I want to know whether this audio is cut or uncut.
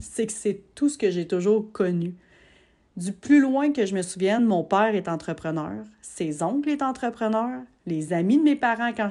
uncut